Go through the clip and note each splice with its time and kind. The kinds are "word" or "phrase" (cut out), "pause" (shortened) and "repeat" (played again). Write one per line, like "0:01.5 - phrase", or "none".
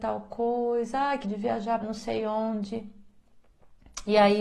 0:01.2 - word
0:01.8 - word